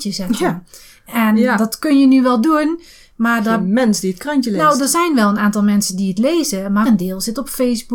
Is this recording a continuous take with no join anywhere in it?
no; 1 cut; at 6.8 s

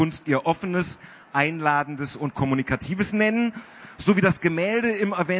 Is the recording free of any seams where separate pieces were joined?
yes; 0 cuts

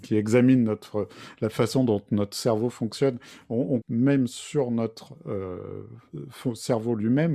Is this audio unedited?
no; 1 cut; at 3.8 s

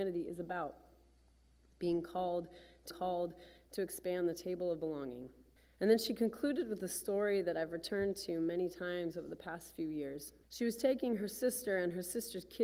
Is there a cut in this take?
yes; 3 cuts; at 2.9 s, 5.6 s, 10.4 s

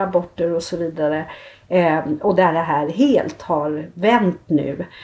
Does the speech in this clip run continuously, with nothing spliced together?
yes; 0 cuts

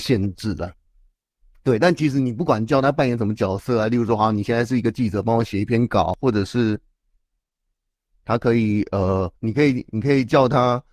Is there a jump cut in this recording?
yes; 1 cut; at 9.4 s

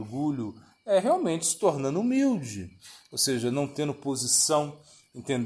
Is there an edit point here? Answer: no; 0 cuts

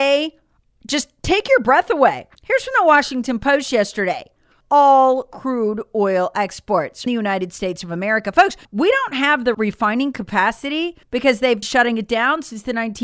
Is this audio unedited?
no; 7 cuts; at 2.3 s, 4.6 s, 7.1 s, 8.6 s, 9.5 s, 11.0 s, 11.6 s

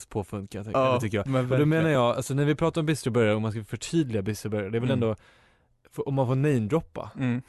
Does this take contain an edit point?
no; 0 cuts

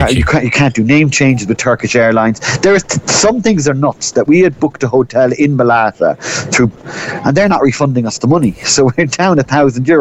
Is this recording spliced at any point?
yes; 3 cuts; at 2.8 s, 4.2 s, 6.7 s

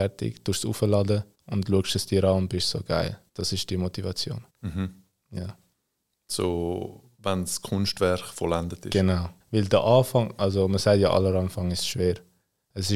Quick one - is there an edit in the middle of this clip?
yes; 4 cuts; at 1.3 s, 3.3 s, 4.5 s, 9.4 s

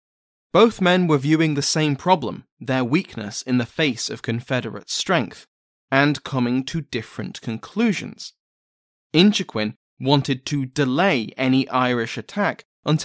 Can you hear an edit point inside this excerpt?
no; 0 cuts

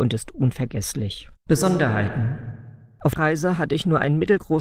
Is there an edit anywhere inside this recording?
yes; 2 cuts; at 1.4 s, 3.2 s

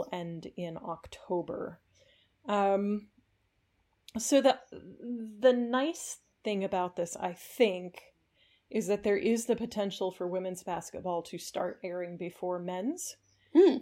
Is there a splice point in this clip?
no; 0 cuts

